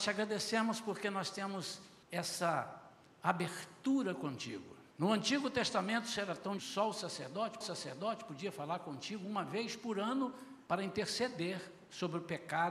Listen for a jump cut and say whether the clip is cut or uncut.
cut